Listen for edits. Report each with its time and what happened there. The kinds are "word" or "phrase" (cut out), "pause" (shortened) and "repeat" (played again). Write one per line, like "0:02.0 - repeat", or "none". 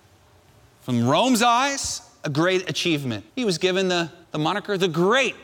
0:03.3 - pause
0:04.2 - pause